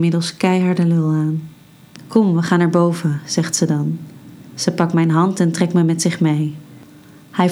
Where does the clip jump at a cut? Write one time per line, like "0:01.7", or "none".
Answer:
none